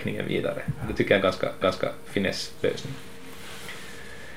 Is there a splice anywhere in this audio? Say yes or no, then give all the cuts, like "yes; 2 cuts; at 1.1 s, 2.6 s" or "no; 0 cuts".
yes; 1 cut; at 1.6 s